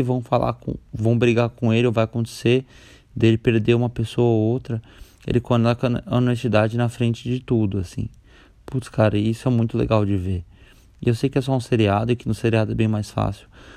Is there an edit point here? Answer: no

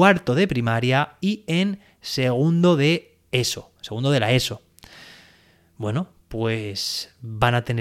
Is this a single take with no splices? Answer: yes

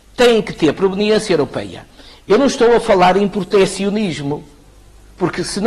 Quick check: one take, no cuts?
yes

